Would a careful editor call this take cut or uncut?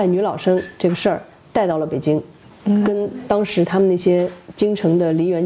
cut